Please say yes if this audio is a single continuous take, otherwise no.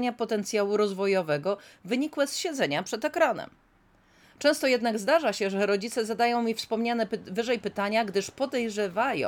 yes